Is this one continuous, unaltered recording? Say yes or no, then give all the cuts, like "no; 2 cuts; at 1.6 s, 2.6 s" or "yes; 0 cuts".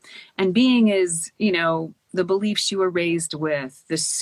yes; 0 cuts